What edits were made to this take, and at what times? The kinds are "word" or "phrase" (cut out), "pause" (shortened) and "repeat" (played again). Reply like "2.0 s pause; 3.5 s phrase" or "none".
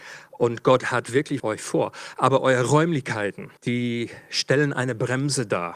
1.4 s phrase; 3.6 s pause